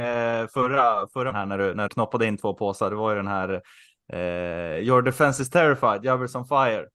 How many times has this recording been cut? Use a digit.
2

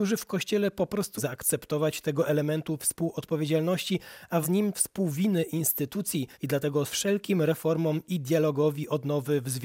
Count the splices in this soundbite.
5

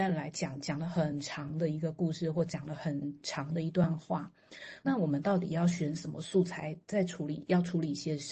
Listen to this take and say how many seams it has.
1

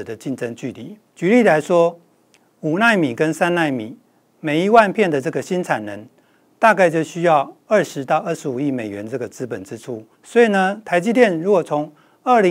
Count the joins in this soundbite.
2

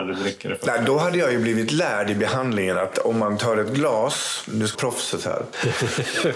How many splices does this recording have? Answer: 1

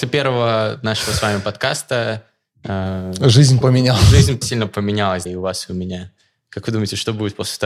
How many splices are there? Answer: 3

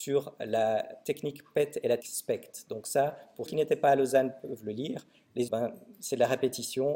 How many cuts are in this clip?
3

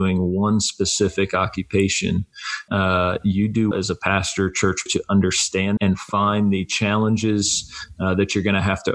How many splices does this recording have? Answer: 4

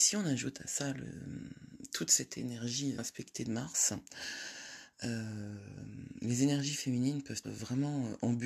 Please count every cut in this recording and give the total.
2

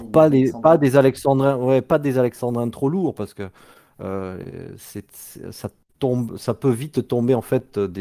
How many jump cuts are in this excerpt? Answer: 0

